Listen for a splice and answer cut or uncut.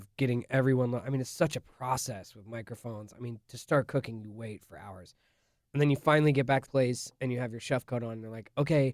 cut